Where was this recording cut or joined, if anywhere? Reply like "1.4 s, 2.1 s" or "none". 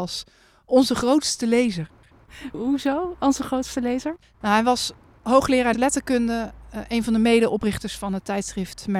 4.2 s, 5.7 s